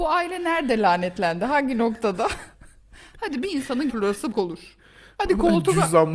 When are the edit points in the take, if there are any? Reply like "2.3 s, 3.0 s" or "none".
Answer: 2.5 s, 3.9 s, 4.3 s

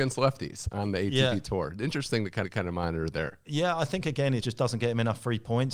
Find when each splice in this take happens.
2.4 s, 4.4 s

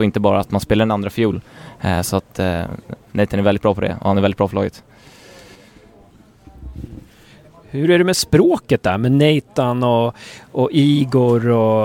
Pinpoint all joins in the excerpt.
none

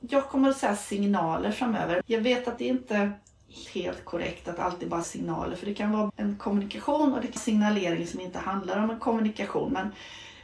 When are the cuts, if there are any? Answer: 2.0 s, 2.6 s, 3.7 s, 5.0 s, 6.1 s, 7.4 s

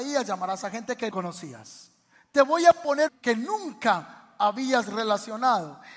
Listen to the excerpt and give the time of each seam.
1.1 s, 3.1 s

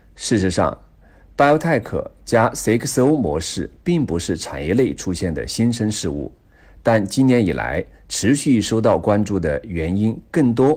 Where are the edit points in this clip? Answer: none

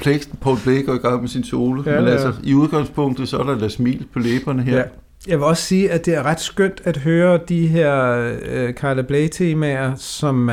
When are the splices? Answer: none

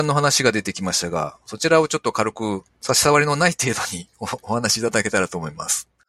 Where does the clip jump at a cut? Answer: 2.7 s

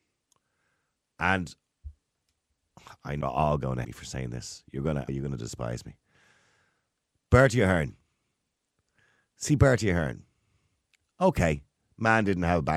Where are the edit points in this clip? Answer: 3.2 s, 3.8 s, 5.1 s

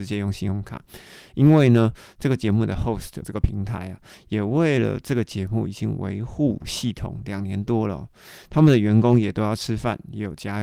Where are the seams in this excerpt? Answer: 3.2 s

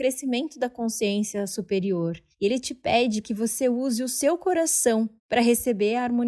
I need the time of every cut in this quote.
2.3 s, 3.2 s, 5.2 s

